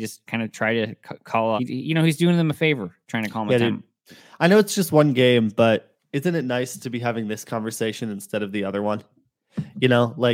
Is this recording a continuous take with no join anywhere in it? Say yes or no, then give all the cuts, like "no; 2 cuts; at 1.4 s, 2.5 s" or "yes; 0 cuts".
no; 1 cut; at 1.6 s